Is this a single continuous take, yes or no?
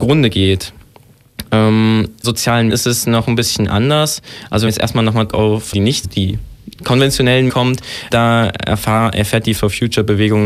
no